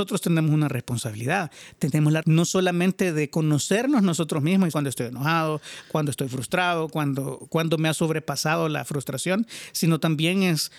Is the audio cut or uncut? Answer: cut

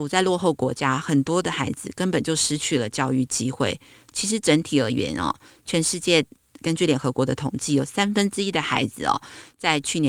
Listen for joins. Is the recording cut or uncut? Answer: uncut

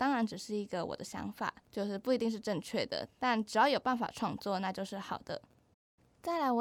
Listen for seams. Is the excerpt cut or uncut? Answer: cut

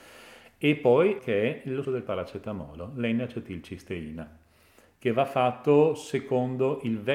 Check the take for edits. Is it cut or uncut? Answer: cut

